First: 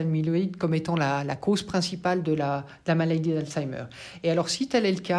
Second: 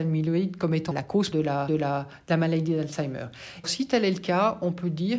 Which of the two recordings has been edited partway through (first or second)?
second